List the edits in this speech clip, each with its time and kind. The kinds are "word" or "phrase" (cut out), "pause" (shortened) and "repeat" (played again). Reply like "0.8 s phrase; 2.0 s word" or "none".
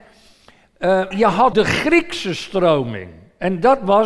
1.1 s word; 1.5 s word